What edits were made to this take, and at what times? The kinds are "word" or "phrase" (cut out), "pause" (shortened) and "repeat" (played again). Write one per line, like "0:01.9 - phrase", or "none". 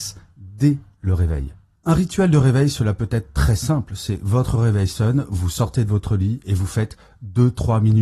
none